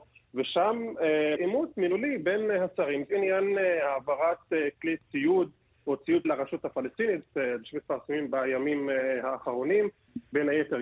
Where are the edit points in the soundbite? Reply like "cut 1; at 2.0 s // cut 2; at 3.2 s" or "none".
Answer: cut 1; at 1.4 s // cut 2; at 3.1 s // cut 3; at 4.7 s // cut 4; at 6.2 s // cut 5; at 7.6 s